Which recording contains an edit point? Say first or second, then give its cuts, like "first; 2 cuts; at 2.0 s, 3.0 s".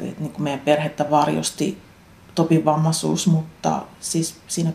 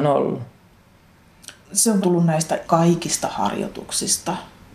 second; 3 cuts; at 1.6 s, 2.0 s, 2.6 s